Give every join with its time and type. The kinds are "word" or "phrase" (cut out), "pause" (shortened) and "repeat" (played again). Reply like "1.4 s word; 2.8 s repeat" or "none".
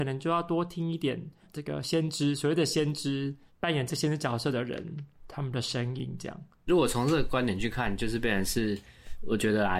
none